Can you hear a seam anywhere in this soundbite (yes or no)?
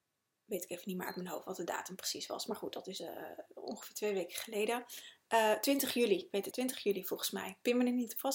yes